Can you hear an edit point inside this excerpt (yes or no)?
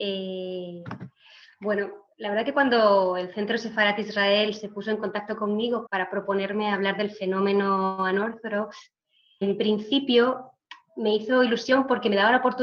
yes